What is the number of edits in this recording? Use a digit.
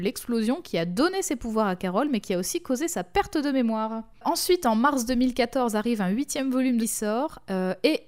1